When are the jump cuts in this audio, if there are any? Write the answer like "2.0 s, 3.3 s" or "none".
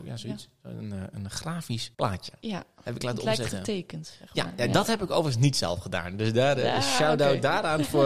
1.9 s